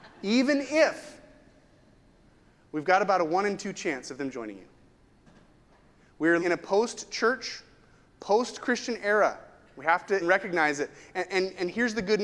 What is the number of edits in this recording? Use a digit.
3